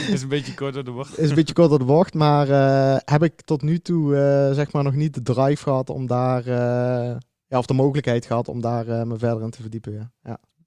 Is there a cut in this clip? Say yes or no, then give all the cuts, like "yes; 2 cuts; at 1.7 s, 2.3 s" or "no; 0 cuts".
no; 0 cuts